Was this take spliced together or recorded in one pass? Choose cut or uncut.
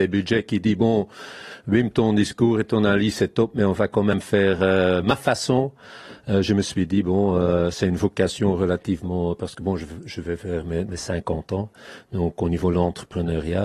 uncut